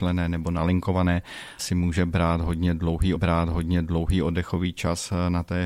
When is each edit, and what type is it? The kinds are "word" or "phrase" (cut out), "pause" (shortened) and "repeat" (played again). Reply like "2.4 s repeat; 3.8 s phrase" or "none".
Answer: 1.6 s phrase; 3.1 s repeat